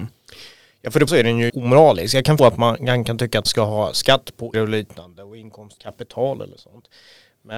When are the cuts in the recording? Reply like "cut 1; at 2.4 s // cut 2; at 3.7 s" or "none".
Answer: cut 1; at 1.1 s // cut 2; at 1.5 s // cut 3; at 2.4 s // cut 4; at 3.4 s // cut 5; at 4.5 s // cut 6; at 5.8 s